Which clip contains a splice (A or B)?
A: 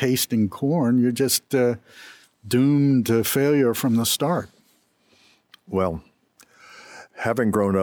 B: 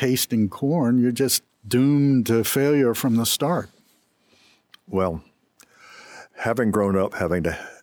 B